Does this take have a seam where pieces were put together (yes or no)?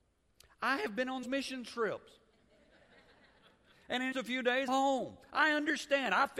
yes